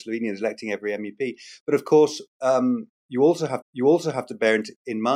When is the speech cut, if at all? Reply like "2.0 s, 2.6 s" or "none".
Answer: 3.6 s